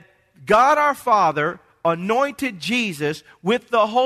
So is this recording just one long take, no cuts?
yes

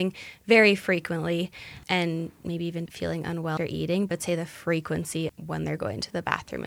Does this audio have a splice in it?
yes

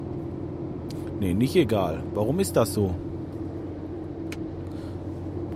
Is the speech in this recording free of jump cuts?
yes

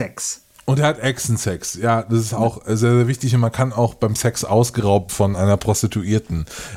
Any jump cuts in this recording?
yes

